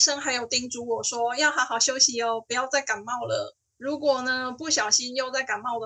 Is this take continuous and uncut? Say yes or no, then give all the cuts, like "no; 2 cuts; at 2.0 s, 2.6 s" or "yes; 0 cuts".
no; 1 cut; at 3.7 s